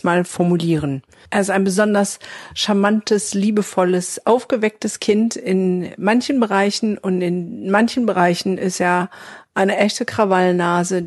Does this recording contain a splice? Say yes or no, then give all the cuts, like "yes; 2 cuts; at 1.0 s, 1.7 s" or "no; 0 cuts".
no; 0 cuts